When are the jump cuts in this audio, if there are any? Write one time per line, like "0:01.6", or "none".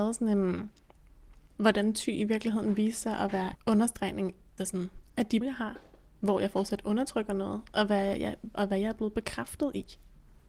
0:03.5
0:04.6
0:05.4